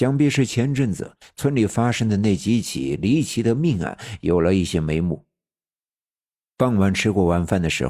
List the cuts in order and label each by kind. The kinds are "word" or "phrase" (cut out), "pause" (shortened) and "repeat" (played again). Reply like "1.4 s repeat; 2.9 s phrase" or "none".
none